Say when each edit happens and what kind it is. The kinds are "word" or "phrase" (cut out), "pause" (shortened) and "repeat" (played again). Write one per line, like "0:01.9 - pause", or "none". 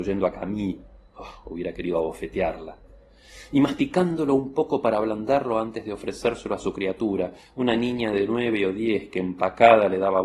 none